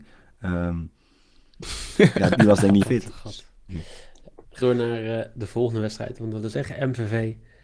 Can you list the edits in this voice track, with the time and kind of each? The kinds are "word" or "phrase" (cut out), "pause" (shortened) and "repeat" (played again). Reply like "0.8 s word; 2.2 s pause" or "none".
2.3 s word; 2.8 s word; 3.7 s word; 4.6 s word; 6.5 s word